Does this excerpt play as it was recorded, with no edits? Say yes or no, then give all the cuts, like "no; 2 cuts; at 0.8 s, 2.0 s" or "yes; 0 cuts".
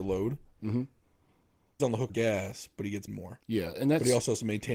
no; 3 cuts; at 1.8 s, 2.1 s, 3.1 s